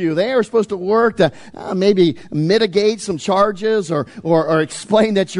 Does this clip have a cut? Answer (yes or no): no